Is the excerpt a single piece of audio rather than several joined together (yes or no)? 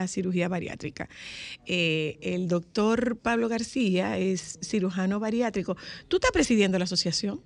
yes